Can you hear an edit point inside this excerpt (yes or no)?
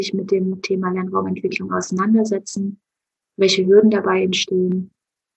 no